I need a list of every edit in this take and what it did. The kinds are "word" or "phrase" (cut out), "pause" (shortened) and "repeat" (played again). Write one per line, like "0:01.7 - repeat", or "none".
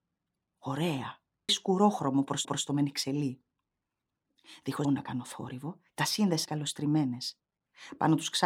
0:01.5 - phrase
0:02.4 - repeat
0:04.8 - word
0:05.9 - pause
0:06.5 - phrase